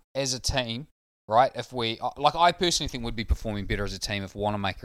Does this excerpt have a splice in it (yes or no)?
no